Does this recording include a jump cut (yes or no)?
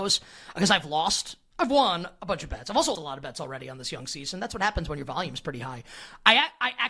yes